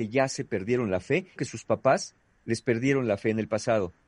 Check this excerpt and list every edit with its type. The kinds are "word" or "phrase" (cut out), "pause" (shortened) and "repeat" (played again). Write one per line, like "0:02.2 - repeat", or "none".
0:01.4 - word